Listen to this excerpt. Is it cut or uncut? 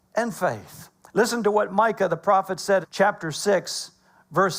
cut